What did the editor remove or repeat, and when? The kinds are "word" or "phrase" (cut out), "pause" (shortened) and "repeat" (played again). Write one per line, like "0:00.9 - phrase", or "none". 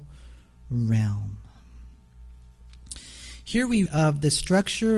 0:03.9 - word